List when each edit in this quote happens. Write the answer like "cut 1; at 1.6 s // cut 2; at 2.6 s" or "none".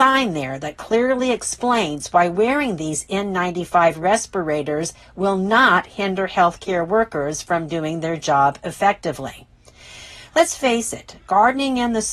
none